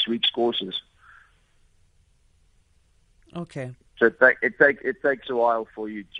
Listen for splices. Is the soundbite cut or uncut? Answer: uncut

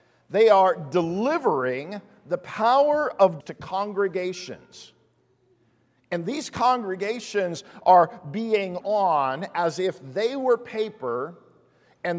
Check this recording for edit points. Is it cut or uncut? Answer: cut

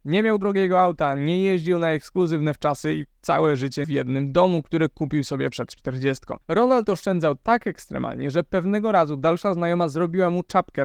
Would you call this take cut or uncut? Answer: cut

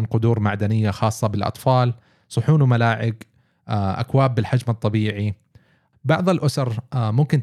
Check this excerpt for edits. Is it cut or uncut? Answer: uncut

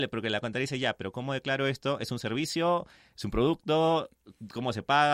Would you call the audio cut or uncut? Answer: uncut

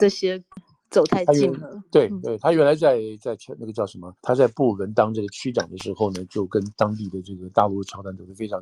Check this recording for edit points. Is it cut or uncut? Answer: cut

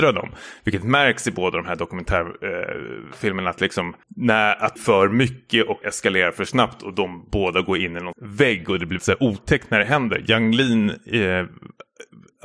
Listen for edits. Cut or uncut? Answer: cut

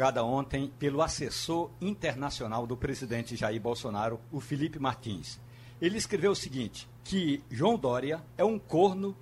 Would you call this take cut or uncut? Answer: cut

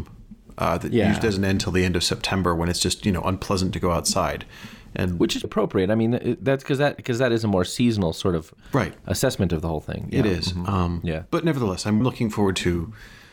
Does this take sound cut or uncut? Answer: cut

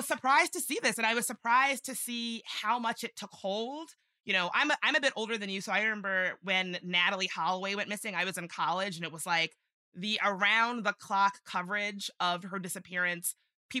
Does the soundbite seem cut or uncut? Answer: uncut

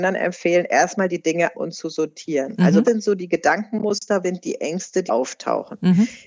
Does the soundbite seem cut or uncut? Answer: cut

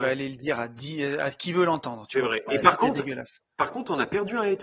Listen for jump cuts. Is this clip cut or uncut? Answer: cut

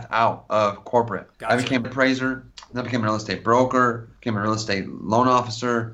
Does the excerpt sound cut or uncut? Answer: cut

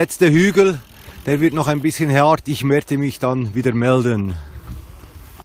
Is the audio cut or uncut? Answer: uncut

